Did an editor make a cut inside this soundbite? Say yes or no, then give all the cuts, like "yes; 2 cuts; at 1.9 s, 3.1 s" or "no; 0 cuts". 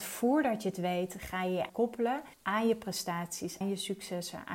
yes; 3 cuts; at 1.7 s, 2.3 s, 3.6 s